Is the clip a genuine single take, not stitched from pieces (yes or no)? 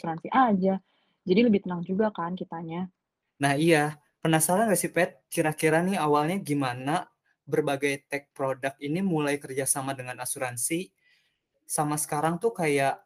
yes